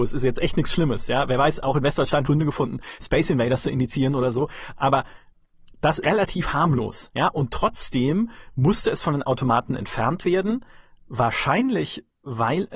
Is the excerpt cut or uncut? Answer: cut